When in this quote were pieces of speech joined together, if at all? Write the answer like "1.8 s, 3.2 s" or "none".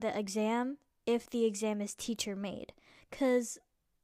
none